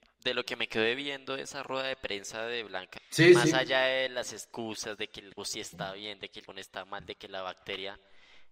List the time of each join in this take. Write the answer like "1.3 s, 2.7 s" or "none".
3.0 s, 5.4 s, 6.5 s